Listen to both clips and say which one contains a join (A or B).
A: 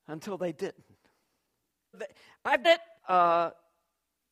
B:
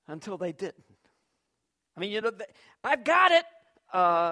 A